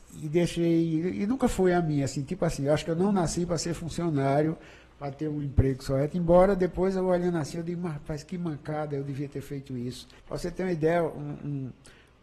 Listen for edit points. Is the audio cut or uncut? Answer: cut